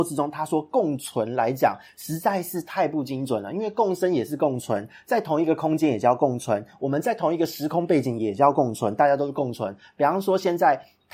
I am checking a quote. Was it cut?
no; 0 cuts

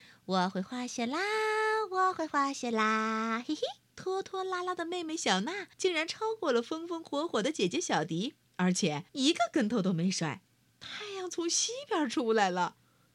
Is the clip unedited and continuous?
no; 5 cuts; at 3.8 s, 5.7 s, 8.4 s, 9.1 s, 10.7 s

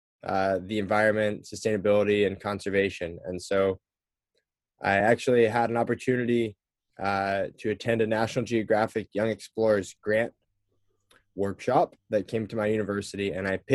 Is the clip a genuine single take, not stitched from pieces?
yes; 0 cuts

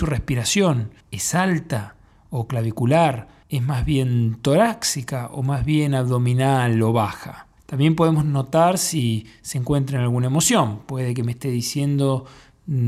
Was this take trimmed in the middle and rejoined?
yes; 3 cuts; at 1.0 s, 3.4 s, 7.6 s

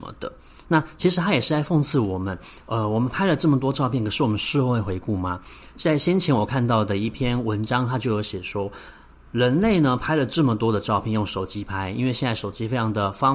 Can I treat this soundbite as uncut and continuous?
yes; 0 cuts

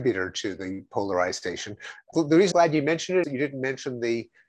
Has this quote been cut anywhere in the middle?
yes; 3 cuts; at 2.1 s, 2.5 s, 3.2 s

